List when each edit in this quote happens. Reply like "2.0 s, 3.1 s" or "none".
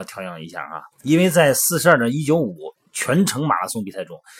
0.9 s, 2.8 s